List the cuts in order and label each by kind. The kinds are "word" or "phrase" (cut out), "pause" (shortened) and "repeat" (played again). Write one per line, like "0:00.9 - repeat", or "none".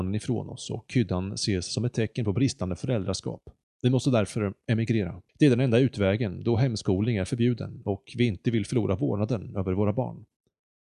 0:03.6 - pause
0:05.3 - pause